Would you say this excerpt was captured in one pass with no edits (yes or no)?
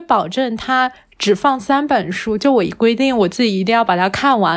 yes